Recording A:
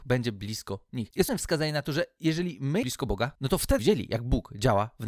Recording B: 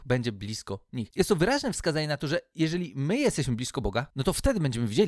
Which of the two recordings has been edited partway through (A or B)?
A